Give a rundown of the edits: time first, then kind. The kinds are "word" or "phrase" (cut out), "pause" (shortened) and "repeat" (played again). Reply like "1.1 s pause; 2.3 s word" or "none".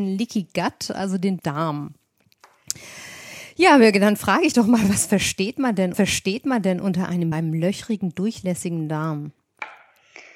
1.4 s word; 4.5 s word; 5.9 s repeat; 7.3 s phrase